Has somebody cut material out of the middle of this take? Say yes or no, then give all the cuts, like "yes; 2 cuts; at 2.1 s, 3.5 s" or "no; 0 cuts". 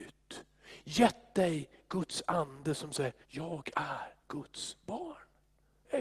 yes; 2 cuts; at 3.2 s, 4.2 s